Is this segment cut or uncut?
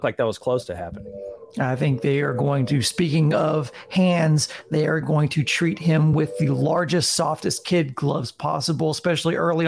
uncut